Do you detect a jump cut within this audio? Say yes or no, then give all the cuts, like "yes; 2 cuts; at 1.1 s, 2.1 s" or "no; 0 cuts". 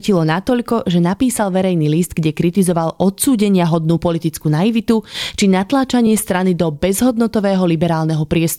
no; 0 cuts